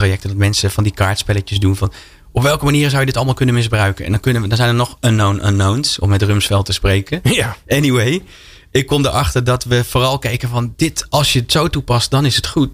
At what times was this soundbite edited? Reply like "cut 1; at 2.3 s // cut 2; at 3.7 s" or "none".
none